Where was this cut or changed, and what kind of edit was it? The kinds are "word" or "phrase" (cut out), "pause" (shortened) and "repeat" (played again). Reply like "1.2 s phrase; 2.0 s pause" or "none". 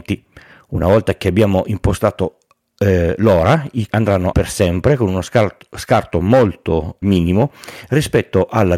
3.9 s word; 4.3 s word; 7.0 s word